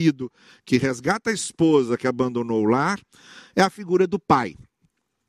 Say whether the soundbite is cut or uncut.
uncut